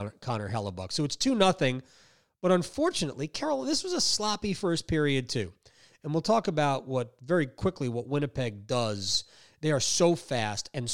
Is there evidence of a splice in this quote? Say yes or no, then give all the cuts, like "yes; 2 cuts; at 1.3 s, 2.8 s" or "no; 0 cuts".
no; 0 cuts